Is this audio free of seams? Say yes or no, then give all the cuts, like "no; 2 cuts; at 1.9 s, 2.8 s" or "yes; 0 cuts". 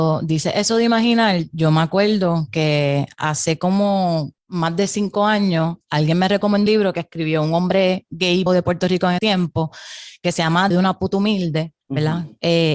no; 6 cuts; at 4.4 s, 6.7 s, 8.5 s, 9.2 s, 10.7 s, 11.8 s